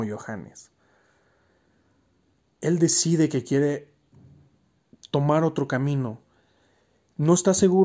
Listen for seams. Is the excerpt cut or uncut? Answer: uncut